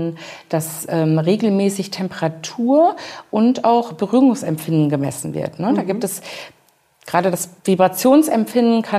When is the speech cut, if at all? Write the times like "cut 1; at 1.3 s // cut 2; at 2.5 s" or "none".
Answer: cut 1; at 7.6 s